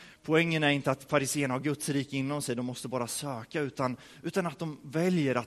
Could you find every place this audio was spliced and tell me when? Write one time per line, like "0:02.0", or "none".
none